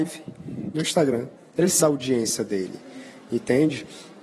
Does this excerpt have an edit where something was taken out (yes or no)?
yes